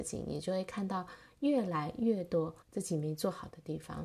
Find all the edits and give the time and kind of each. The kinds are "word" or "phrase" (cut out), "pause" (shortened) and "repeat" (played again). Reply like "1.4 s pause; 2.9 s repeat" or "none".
2.6 s pause

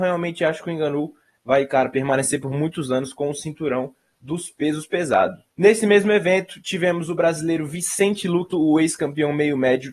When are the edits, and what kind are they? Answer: 5.5 s pause; 8.5 s word

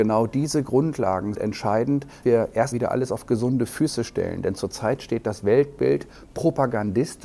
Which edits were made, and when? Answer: 1.3 s word; 2.2 s word; 2.7 s word

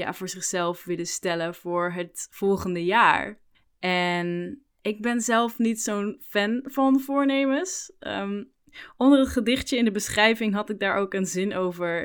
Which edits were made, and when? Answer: 3.5 s pause

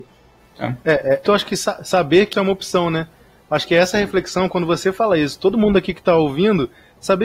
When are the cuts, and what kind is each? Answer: 1.2 s word; 2.3 s word

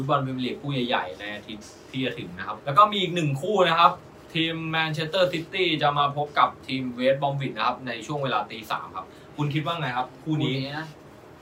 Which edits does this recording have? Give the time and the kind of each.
2.6 s phrase

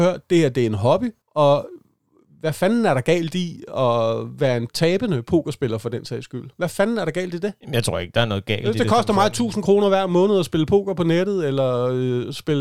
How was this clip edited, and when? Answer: 1.2 s pause; 4.7 s word; 7.6 s pause

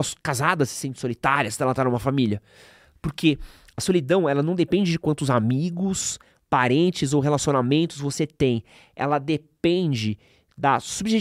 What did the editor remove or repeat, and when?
none

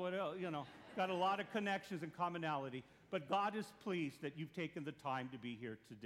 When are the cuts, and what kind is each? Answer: none

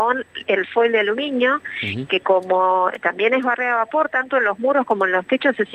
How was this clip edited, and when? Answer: none

